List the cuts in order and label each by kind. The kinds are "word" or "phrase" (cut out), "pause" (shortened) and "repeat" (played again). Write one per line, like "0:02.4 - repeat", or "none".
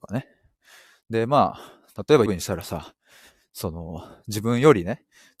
0:02.3 - word